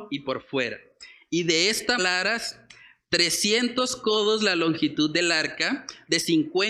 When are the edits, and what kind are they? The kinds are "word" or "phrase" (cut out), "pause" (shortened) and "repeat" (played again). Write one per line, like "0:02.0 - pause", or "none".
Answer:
0:02.0 - word